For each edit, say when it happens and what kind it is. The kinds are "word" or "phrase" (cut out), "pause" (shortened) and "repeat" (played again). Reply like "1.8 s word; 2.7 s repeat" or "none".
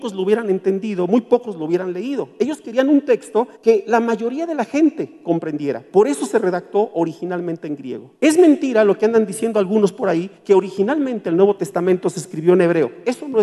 3.6 s pause; 8.1 s pause; 10.4 s pause